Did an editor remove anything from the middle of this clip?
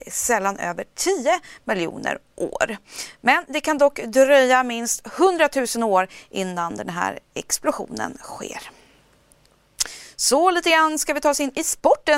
no; 0 cuts

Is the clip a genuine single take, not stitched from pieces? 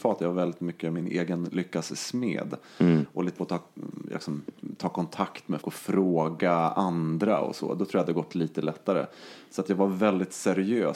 no; 2 cuts; at 3.4 s, 5.6 s

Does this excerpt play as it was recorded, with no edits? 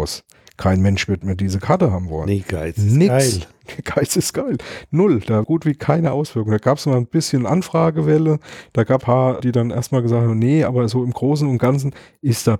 no; 3 cuts; at 5.4 s, 9.0 s, 9.4 s

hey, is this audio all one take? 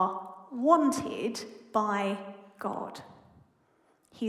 yes; 0 cuts

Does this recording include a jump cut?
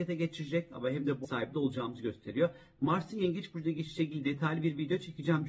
yes; 1 cut; at 1.2 s

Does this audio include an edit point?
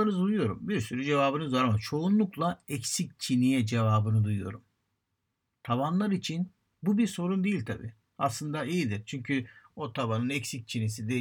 no; 0 cuts

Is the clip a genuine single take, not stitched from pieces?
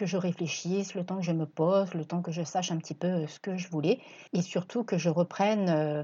no; 1 cut; at 4.3 s

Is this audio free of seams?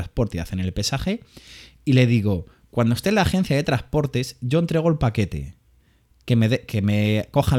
yes; 0 cuts

